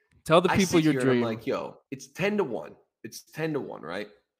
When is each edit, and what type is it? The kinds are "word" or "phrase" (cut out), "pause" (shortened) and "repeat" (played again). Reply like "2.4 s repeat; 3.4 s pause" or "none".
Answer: 1.8 s pause